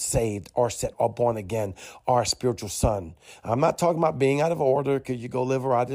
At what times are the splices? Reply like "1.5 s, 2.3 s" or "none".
0.9 s